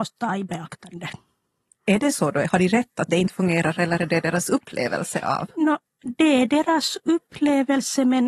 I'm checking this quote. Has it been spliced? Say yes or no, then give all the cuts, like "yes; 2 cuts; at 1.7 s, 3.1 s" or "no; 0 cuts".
no; 0 cuts